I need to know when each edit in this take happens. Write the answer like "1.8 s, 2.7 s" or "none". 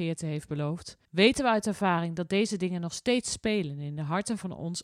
1.0 s